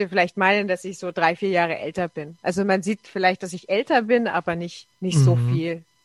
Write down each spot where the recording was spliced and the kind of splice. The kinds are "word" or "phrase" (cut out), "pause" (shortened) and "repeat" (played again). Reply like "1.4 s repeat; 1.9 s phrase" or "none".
4.9 s pause